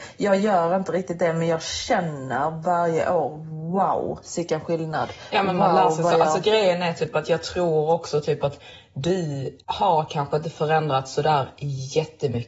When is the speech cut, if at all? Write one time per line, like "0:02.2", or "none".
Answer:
0:09.6

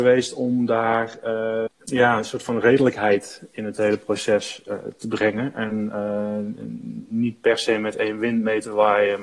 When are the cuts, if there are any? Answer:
0:01.7

